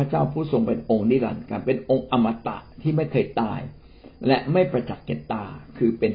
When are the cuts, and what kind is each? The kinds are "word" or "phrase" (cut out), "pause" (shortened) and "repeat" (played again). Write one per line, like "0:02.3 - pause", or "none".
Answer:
0:02.7 - pause
0:04.2 - pause